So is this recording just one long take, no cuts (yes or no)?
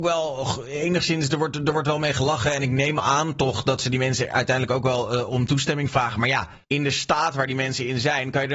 no